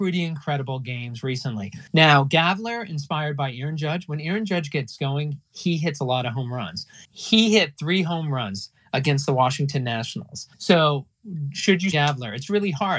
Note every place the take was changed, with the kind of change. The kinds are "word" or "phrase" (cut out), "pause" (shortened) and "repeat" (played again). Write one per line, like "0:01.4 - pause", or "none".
0:01.9 - pause
0:07.0 - pause
0:10.5 - pause
0:11.9 - word